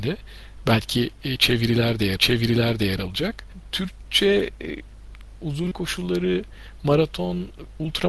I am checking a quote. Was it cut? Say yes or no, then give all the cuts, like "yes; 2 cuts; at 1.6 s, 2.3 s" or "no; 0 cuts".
yes; 3 cuts; at 2.2 s, 5.4 s, 5.7 s